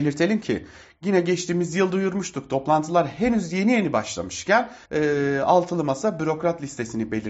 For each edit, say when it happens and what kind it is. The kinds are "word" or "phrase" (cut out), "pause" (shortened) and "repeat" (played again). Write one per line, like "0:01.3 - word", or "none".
0:04.8 - pause